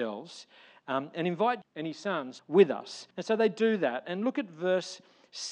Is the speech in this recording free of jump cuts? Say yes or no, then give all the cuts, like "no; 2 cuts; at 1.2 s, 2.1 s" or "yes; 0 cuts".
no; 3 cuts; at 1.6 s, 2.4 s, 3.1 s